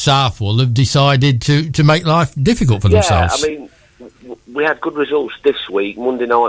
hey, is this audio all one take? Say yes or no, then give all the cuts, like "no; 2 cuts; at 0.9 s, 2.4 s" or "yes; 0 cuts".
yes; 0 cuts